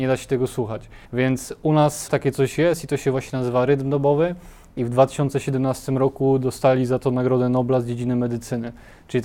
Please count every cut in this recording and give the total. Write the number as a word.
two